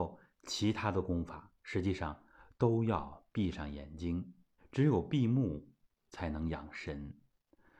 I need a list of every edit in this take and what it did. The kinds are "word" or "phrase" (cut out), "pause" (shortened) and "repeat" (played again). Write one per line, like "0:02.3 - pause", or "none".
0:01.6 - pause
0:04.6 - pause
0:05.8 - pause